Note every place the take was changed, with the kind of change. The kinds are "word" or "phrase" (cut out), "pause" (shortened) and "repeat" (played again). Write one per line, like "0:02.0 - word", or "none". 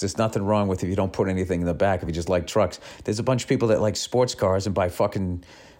none